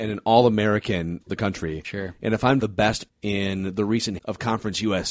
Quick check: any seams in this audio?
yes; 4 cuts; at 1.2 s, 2.6 s, 3.1 s, 4.2 s

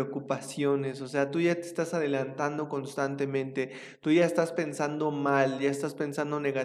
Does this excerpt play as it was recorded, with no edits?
yes; 0 cuts

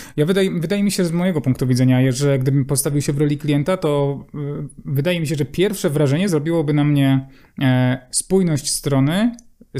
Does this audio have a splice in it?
no; 0 cuts

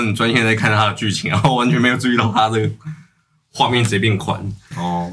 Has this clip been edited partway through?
no; 0 cuts

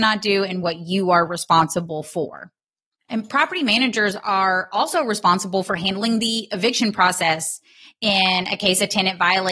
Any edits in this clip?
no; 0 cuts

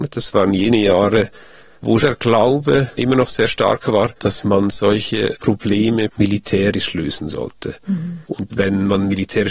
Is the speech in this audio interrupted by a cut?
yes; 3 cuts; at 2.0 s, 4.2 s, 8.5 s

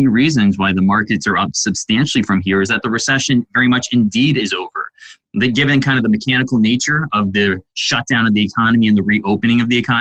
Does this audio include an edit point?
no; 0 cuts

